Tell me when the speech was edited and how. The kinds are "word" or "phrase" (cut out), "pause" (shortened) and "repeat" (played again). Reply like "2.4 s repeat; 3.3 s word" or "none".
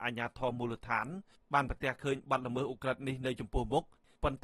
none